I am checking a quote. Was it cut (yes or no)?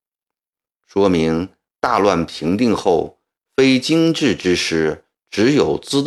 no